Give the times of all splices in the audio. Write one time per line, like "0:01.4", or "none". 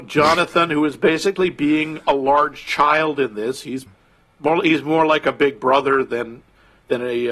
0:03.9